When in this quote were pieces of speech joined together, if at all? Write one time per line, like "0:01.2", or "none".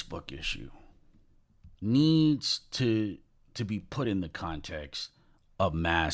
none